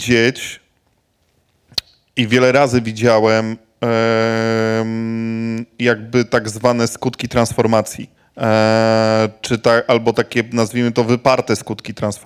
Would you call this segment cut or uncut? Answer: cut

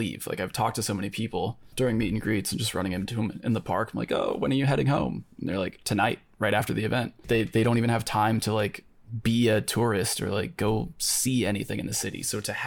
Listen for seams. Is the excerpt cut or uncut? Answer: uncut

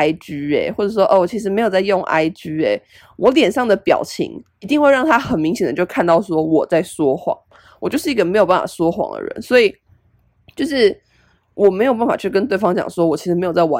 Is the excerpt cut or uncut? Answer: uncut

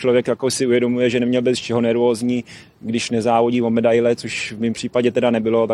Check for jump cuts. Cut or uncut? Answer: uncut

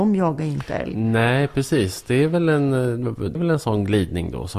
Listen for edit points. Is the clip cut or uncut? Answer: cut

